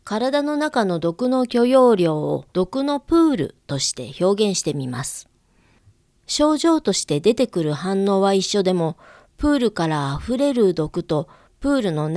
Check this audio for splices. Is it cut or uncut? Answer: cut